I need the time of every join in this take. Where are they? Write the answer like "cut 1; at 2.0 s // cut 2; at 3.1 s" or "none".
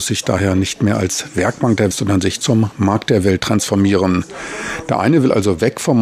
cut 1; at 1.9 s